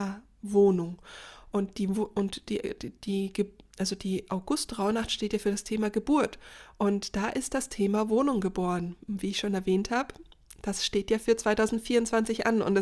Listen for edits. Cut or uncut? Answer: uncut